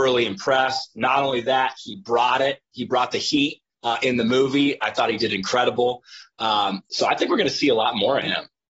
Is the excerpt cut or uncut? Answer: cut